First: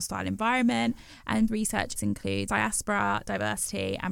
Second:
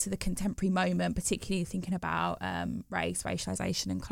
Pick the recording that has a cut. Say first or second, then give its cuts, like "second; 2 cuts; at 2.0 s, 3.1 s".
first; 3 cuts; at 1.5 s, 2.0 s, 2.5 s